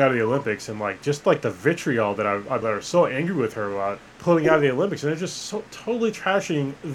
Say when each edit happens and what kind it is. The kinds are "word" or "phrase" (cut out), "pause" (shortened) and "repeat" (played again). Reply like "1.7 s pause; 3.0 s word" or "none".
2.6 s phrase; 4.1 s pause